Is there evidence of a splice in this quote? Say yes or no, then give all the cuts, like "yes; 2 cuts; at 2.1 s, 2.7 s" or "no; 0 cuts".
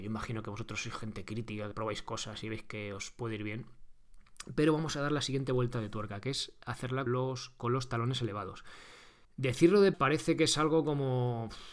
yes; 4 cuts; at 1.7 s, 7.1 s, 9.2 s, 9.9 s